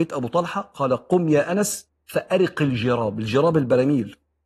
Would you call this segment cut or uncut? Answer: uncut